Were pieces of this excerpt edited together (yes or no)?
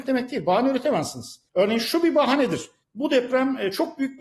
no